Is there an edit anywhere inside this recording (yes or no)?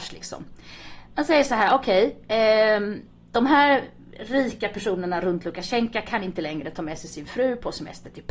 no